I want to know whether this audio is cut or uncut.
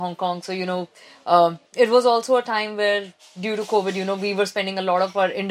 cut